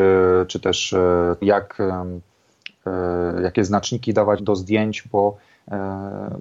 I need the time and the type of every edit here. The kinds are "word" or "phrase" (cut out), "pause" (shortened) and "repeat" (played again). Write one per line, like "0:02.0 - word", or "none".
0:01.4 - word
0:04.4 - word